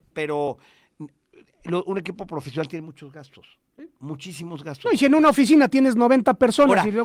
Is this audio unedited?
yes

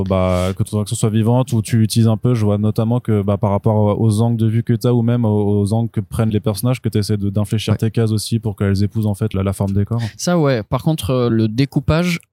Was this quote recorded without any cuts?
no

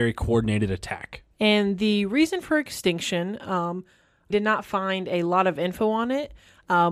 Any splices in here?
yes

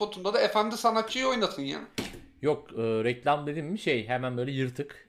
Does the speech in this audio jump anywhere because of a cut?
no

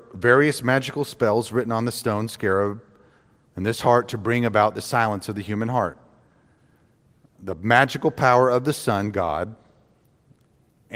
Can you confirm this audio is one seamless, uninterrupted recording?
yes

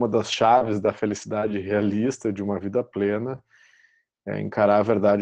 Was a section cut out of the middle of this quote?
no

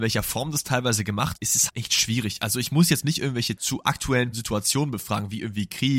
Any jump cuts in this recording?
yes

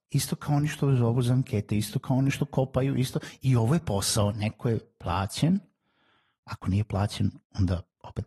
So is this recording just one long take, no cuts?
yes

